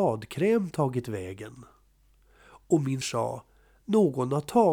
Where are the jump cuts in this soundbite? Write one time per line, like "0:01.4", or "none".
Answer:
0:03.0